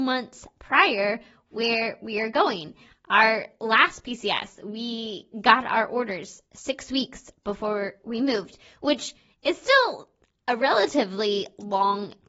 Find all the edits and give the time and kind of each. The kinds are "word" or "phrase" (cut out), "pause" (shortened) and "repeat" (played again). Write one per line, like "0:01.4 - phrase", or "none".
none